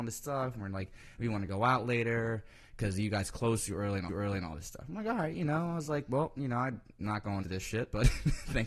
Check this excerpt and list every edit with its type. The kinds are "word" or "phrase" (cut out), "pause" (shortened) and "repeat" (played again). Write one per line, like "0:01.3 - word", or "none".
0:04.1 - repeat
0:07.4 - phrase